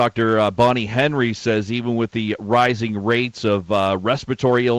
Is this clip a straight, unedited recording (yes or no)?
yes